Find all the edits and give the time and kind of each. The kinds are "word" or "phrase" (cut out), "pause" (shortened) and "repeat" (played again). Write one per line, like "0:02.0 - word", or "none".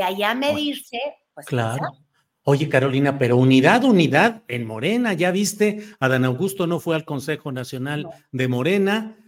none